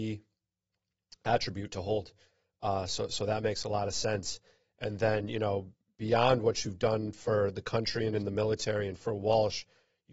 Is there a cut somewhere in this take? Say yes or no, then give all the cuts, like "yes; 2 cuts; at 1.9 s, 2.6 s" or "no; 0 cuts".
no; 0 cuts